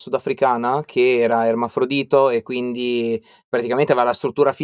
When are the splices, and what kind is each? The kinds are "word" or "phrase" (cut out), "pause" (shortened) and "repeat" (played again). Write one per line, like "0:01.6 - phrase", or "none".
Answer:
none